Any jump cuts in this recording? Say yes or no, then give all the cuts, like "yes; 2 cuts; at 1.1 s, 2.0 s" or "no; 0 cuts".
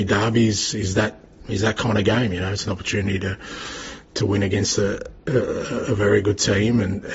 no; 0 cuts